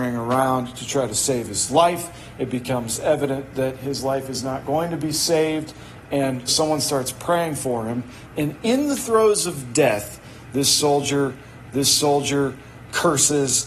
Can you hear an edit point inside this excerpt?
yes; 2 cuts; at 6.5 s, 11.7 s

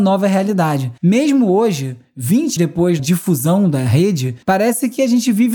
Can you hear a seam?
yes; 4 cuts; at 1.0 s, 2.6 s, 3.0 s, 4.4 s

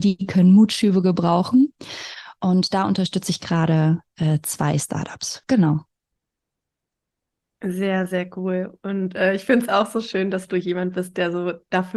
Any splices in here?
no; 0 cuts

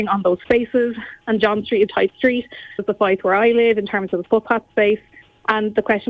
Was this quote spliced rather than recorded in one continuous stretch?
yes; 2 cuts; at 1.9 s, 2.8 s

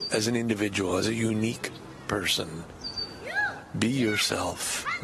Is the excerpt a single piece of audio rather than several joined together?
yes; 0 cuts

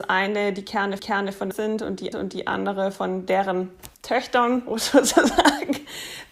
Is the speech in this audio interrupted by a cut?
yes; 4 cuts; at 1.0 s, 1.5 s, 2.1 s, 3.9 s

